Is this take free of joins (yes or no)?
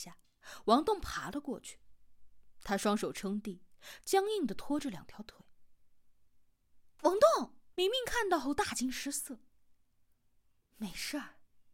yes